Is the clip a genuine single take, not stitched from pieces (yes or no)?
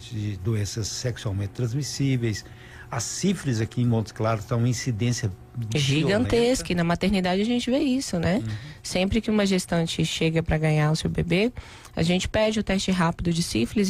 yes